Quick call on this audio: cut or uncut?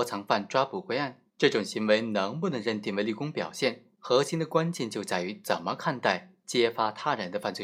cut